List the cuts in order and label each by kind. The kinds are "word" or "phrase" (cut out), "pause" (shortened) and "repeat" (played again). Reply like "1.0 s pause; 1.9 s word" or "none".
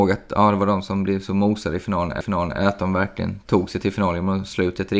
2.2 s repeat